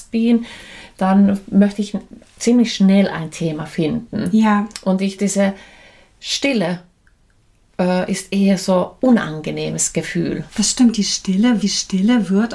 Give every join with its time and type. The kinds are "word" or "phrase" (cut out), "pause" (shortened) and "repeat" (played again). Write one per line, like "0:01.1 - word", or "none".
0:05.2 - word
0:10.5 - pause
0:11.6 - repeat